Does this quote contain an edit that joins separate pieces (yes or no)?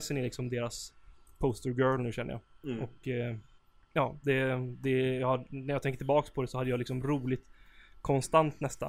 yes